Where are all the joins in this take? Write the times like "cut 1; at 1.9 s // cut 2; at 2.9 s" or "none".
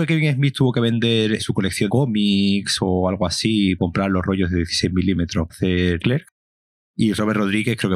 cut 1; at 1.4 s // cut 2; at 1.9 s // cut 3; at 3.8 s // cut 4; at 5.5 s // cut 5; at 6.0 s